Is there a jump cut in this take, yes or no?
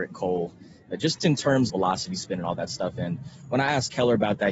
yes